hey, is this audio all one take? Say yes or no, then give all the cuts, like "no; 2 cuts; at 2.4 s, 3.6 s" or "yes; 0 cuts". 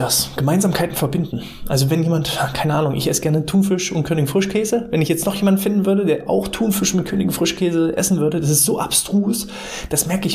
yes; 0 cuts